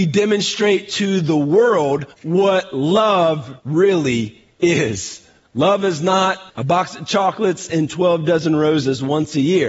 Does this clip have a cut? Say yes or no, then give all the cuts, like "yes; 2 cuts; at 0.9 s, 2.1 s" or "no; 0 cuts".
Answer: yes; 4 cuts; at 2.1 s, 3.6 s, 5.4 s, 6.5 s